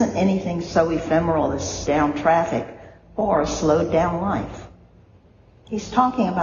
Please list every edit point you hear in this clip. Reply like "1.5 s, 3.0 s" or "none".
1.9 s